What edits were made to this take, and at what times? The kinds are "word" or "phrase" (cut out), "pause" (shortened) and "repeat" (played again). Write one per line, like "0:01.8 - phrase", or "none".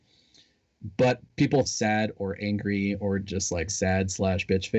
0:01.6 - phrase
0:03.7 - word